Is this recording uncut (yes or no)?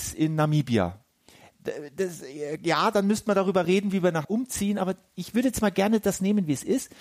no